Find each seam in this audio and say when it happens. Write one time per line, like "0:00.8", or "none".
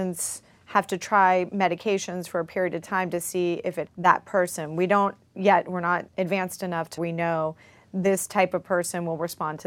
0:03.9
0:06.1
0:07.0